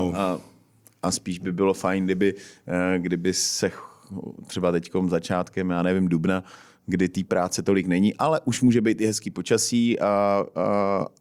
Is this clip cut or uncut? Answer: uncut